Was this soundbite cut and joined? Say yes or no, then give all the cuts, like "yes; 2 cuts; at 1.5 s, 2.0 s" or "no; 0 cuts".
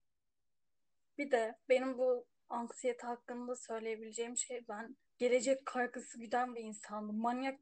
yes; 1 cut; at 5.1 s